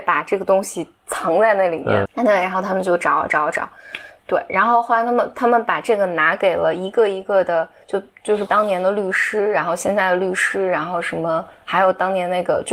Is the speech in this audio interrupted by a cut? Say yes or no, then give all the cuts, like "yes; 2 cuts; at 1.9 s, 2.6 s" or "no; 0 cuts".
yes; 2 cuts; at 2.0 s, 8.5 s